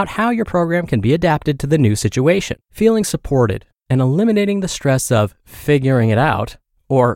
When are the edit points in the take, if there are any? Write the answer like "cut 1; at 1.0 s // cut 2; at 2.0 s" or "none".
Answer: cut 1; at 2.6 s

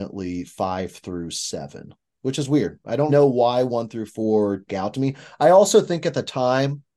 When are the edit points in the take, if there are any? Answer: cut 1; at 2.1 s // cut 2; at 3.1 s // cut 3; at 4.7 s

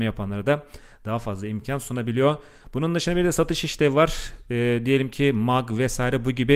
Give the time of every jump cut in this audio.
none

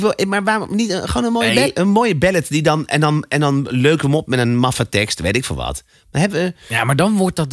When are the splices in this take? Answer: none

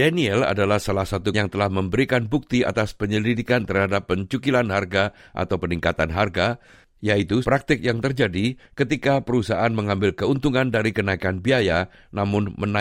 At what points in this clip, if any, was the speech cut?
cut 1; at 1.3 s // cut 2; at 7.4 s

